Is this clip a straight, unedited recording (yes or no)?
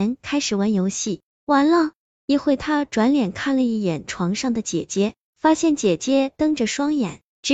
yes